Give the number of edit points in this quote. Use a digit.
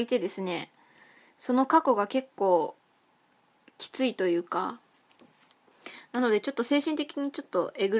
0